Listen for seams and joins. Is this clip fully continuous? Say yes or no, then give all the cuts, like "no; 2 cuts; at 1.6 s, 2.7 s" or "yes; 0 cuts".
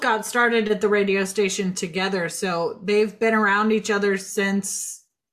yes; 0 cuts